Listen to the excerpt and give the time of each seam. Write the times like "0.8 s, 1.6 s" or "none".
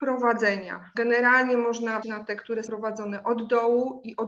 0.9 s, 2.0 s, 2.7 s

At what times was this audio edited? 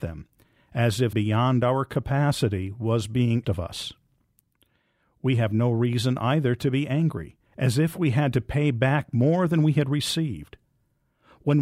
1.1 s, 3.4 s, 7.5 s

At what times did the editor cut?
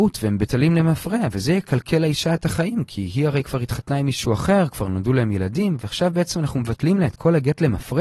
none

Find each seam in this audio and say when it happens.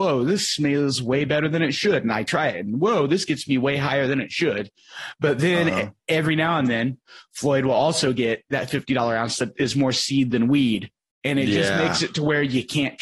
none

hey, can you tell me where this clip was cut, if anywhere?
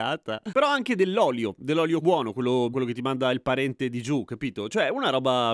2.0 s, 2.7 s

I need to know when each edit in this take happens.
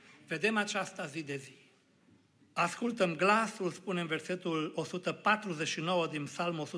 1.8 s

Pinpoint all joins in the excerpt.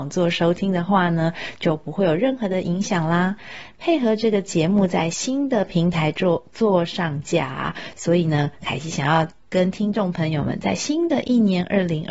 none

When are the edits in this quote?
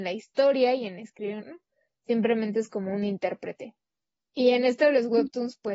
1.4 s

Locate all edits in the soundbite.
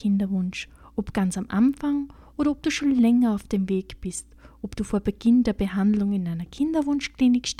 none

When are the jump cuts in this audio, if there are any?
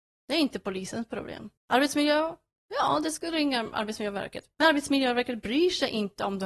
1.6 s

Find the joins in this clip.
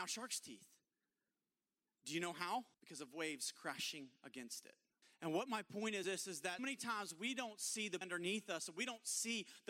2.7 s, 5.0 s, 6.0 s, 6.6 s, 8.0 s

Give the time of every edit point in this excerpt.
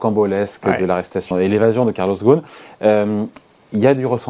1.3 s

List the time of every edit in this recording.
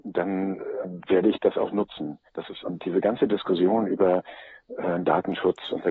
2.3 s, 2.6 s

